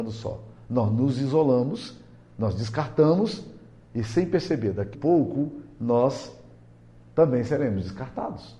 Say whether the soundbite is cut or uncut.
cut